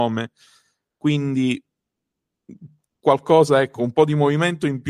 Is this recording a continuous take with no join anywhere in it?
yes; 0 cuts

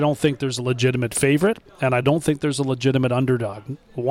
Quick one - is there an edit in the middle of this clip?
no; 0 cuts

